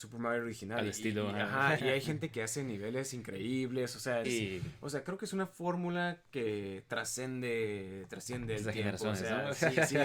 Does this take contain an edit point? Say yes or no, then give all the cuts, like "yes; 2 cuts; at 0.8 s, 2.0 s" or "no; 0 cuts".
yes; 2 cuts; at 1.8 s, 4.2 s